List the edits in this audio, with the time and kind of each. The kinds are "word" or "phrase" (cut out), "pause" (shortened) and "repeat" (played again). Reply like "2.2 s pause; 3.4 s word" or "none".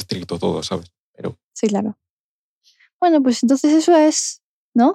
none